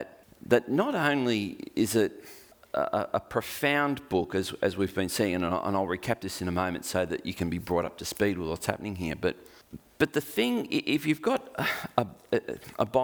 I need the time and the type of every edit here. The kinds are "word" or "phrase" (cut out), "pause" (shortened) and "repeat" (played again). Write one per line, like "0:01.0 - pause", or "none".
none